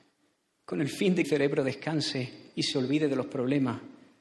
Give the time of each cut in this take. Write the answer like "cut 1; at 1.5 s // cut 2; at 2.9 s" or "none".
cut 1; at 1.2 s